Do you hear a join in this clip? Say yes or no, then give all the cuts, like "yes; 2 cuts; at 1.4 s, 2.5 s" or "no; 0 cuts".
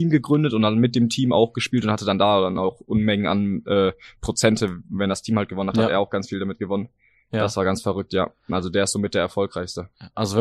no; 0 cuts